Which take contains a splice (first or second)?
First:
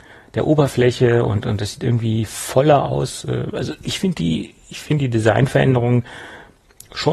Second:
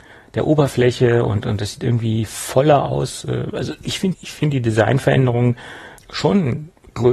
second